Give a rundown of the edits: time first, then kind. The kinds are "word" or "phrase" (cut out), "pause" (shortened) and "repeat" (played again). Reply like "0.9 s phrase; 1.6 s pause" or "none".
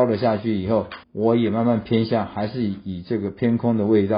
1.0 s pause